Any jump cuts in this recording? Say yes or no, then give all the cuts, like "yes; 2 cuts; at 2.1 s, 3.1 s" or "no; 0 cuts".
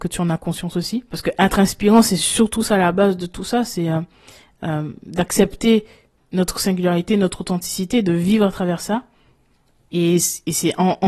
no; 0 cuts